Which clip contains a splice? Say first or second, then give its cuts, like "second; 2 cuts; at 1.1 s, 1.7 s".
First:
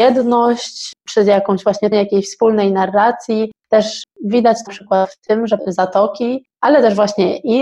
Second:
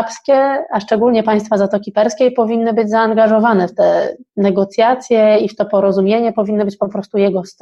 first; 3 cuts; at 1.9 s, 4.7 s, 5.6 s